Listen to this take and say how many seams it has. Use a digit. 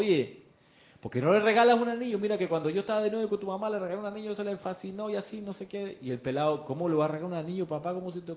0